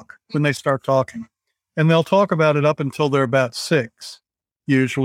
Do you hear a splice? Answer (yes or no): no